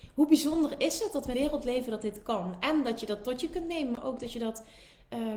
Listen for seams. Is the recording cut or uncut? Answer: cut